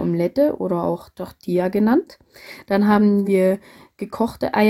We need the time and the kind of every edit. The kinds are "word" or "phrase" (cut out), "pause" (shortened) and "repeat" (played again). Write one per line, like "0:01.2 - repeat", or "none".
none